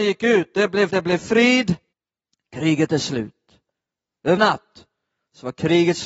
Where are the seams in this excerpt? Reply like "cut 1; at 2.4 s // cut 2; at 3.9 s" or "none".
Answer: cut 1; at 0.9 s // cut 2; at 1.9 s // cut 3; at 4.4 s